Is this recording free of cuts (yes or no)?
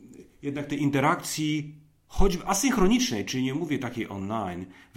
yes